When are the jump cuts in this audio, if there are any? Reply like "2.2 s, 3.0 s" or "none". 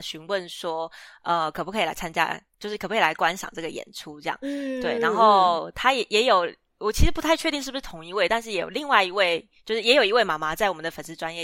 none